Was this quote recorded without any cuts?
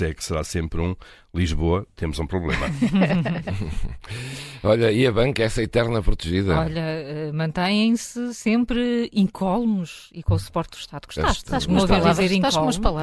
yes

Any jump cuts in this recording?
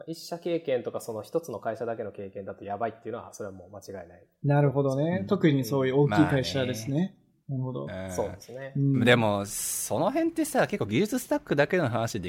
no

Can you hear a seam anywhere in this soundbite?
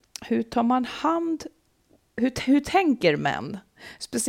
no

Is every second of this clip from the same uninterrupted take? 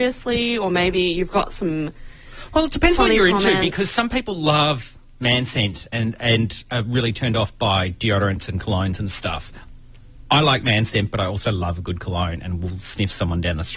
yes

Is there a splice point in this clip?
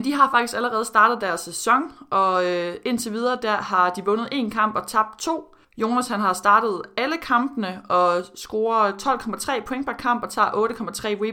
yes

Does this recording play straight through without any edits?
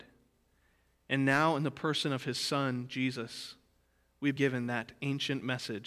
no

